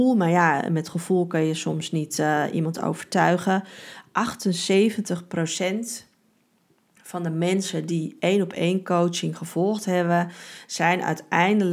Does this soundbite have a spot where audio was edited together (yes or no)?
no